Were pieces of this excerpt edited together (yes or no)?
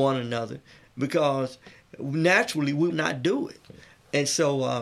yes